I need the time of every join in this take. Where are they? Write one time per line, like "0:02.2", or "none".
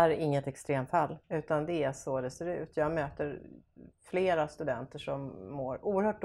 0:01.2